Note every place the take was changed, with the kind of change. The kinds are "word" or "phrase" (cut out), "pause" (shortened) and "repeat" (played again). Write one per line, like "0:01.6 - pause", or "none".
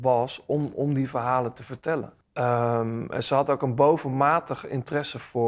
0:02.2 - pause